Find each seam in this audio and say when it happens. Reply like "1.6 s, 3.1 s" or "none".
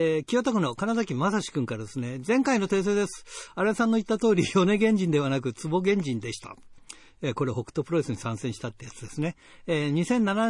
none